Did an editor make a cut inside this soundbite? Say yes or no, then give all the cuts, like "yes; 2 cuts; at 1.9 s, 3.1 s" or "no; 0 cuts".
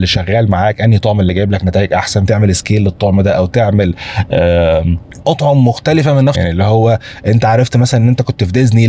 yes; 3 cuts; at 2.3 s, 5.2 s, 6.3 s